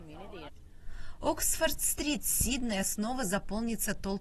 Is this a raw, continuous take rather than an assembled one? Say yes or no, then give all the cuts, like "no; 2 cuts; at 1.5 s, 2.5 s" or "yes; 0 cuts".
yes; 0 cuts